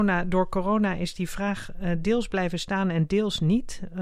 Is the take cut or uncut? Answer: uncut